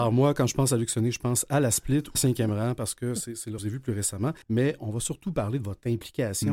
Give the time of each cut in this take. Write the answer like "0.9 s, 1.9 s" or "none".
2.1 s, 3.6 s, 4.4 s